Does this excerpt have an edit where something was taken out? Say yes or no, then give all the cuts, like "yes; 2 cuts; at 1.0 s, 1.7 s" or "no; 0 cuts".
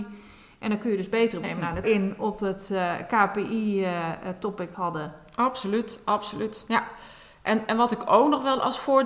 yes; 3 cuts; at 1.4 s, 1.8 s, 4.7 s